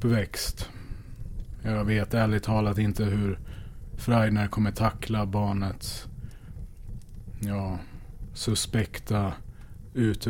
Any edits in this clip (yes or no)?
no